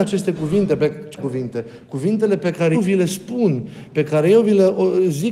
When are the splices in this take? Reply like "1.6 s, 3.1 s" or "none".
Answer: 1.2 s, 2.7 s